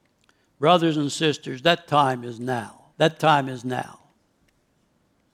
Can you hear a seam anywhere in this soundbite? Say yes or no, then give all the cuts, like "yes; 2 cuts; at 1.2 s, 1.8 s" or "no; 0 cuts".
yes; 1 cut; at 2.9 s